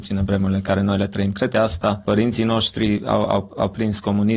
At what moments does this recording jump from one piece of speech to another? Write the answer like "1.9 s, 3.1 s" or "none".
1.5 s, 2.0 s